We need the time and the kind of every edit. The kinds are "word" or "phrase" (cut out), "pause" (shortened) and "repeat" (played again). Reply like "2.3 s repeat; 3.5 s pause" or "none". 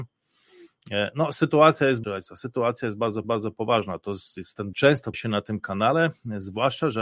2.0 s phrase; 3.2 s repeat; 4.7 s phrase; 5.1 s word